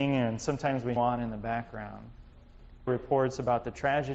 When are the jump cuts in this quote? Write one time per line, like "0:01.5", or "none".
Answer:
0:01.0
0:02.9